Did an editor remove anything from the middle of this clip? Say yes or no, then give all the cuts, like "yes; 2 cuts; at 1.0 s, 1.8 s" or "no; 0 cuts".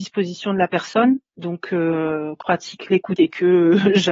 yes; 2 cuts; at 2.4 s, 3.2 s